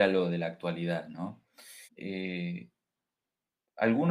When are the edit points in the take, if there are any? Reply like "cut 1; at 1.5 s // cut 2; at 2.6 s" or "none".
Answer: cut 1; at 1.9 s